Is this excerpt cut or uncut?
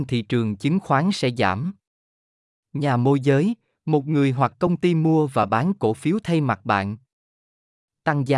uncut